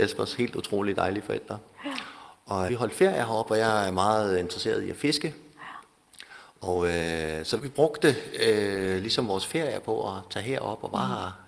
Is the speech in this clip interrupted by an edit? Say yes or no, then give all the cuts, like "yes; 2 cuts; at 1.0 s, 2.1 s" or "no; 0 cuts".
yes; 2 cuts; at 2.7 s, 7.6 s